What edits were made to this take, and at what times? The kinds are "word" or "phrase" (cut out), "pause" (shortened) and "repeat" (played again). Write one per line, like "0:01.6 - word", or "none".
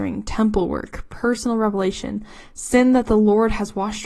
none